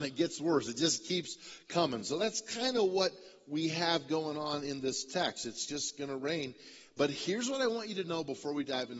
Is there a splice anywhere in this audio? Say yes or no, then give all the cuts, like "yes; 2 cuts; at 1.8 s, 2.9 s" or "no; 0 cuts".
no; 0 cuts